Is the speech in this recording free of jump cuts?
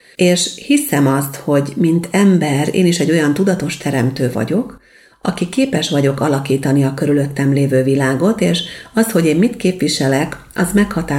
yes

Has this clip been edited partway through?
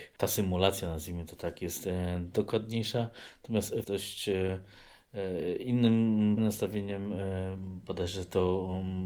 yes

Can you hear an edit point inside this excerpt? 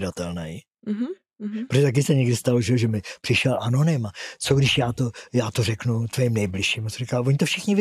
no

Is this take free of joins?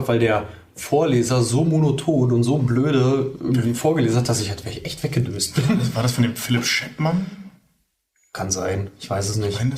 yes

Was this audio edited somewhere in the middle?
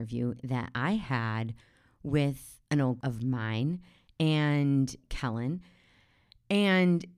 yes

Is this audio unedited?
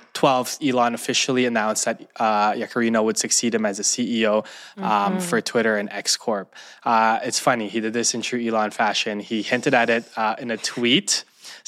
yes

